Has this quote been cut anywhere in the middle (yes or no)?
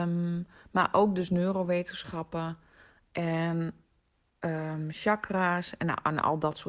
no